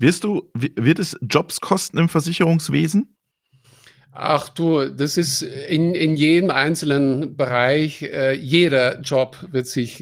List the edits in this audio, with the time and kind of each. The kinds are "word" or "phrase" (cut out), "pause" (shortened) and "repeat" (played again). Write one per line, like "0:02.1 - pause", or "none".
none